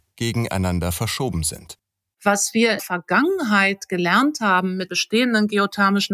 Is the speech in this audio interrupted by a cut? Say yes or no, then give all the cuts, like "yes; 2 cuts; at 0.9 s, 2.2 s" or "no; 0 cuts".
yes; 2 cuts; at 2.8 s, 4.9 s